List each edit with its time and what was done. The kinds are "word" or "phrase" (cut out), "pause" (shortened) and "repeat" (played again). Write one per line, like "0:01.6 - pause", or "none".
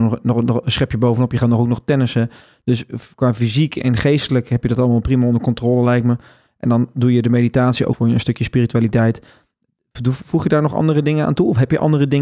0:07.9 - word

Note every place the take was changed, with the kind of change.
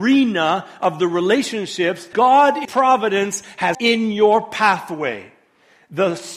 0:02.1 - word
0:02.6 - word
0:03.7 - word

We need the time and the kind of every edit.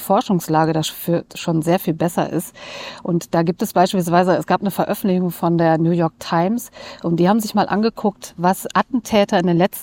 none

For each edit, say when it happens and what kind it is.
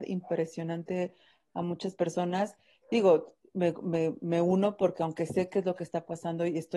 none

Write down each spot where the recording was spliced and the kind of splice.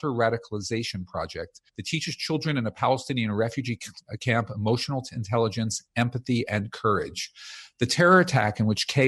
0:01.7 - pause

